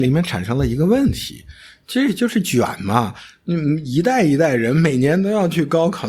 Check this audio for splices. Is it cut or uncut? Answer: uncut